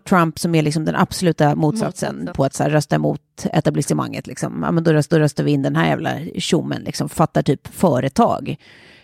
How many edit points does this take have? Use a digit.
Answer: 3